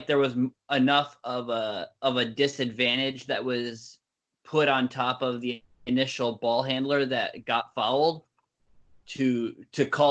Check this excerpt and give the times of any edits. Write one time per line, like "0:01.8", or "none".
none